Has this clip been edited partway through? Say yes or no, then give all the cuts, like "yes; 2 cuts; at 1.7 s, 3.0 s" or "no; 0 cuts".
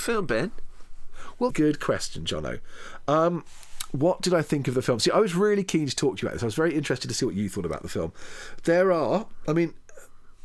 yes; 1 cut; at 1.5 s